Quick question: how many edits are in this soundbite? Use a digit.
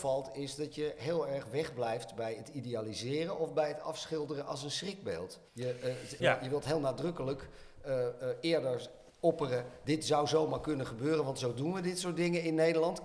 3